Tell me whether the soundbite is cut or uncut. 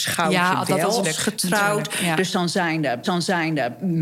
cut